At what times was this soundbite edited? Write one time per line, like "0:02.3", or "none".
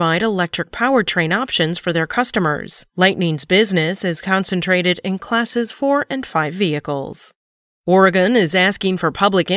none